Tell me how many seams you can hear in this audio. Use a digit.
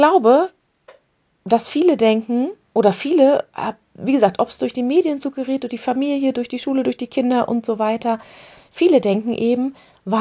0